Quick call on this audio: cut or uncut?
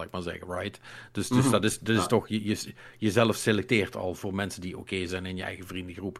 uncut